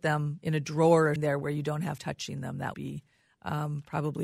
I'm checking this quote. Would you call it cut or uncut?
cut